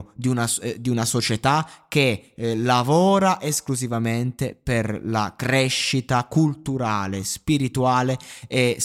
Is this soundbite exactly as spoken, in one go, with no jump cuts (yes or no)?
yes